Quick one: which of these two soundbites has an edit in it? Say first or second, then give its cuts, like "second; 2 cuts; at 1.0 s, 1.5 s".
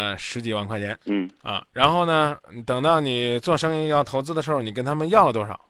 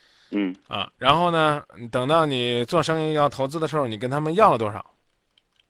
first; 1 cut; at 1.0 s